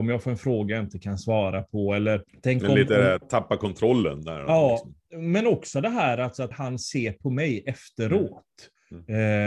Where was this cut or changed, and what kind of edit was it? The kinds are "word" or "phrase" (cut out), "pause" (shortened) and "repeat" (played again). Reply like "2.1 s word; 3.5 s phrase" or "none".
2.3 s pause; 6.5 s phrase